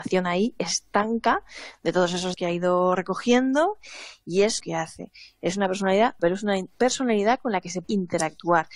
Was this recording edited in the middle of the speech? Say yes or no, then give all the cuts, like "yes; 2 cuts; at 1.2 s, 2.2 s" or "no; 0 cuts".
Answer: yes; 4 cuts; at 2.3 s, 4.6 s, 6.2 s, 7.8 s